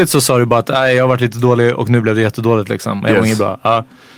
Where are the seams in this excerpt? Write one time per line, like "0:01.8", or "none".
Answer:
none